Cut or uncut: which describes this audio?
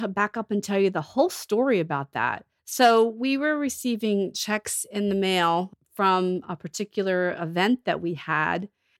uncut